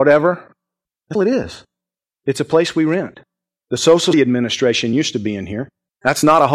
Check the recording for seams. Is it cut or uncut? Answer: cut